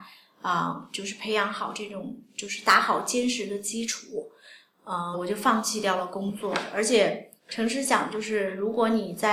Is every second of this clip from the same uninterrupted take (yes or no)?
no